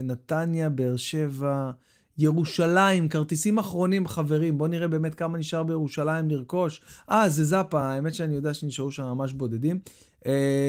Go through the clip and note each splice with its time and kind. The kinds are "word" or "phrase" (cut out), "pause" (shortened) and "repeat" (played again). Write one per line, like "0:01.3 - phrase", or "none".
none

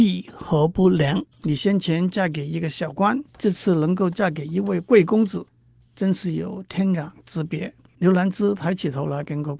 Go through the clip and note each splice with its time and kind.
0:01.3 - pause
0:03.3 - pause
0:07.9 - pause

